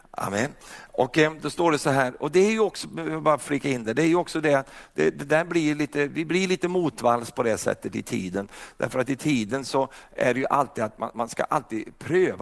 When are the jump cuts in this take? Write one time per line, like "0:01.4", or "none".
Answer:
none